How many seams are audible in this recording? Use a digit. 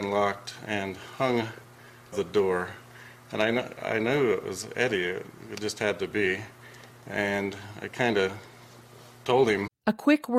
1